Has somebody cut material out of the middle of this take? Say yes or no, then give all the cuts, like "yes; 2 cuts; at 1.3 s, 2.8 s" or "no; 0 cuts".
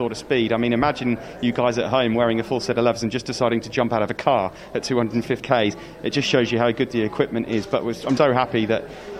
yes; 2 cuts; at 5.4 s, 8.2 s